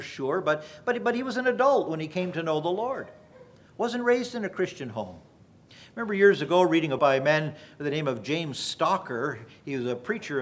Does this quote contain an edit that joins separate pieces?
yes; 1 cut; at 7.0 s

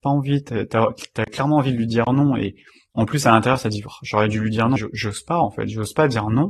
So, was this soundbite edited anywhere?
yes; 1 cut; at 4.8 s

